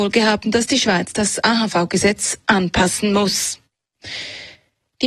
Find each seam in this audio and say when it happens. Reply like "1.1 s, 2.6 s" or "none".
none